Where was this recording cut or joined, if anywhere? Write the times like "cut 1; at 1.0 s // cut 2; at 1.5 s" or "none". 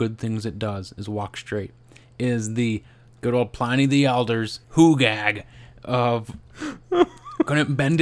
cut 1; at 4.6 s